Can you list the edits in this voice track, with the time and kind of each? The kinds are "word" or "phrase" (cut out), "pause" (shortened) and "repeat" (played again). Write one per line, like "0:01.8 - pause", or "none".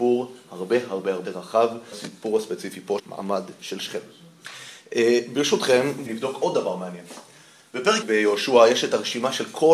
0:01.2 - word
0:01.9 - word
0:03.0 - word
0:03.6 - word
0:06.1 - word
0:08.0 - word